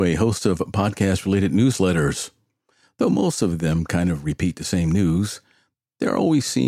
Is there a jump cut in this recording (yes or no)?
no